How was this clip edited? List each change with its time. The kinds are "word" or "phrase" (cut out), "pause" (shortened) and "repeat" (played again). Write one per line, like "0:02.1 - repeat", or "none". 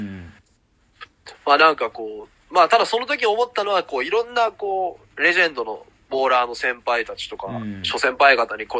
0:01.4 - pause